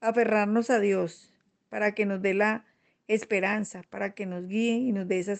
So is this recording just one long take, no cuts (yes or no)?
yes